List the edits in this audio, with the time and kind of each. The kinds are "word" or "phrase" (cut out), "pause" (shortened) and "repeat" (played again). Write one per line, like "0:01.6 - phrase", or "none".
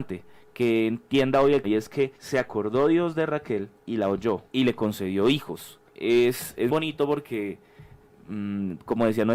0:01.6 - word
0:02.2 - pause
0:03.8 - pause
0:04.5 - pause
0:05.9 - pause
0:06.7 - word